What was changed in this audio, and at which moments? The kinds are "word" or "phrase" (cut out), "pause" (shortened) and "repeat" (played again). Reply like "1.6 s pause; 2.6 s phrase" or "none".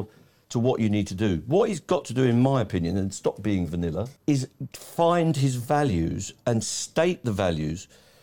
4.2 s pause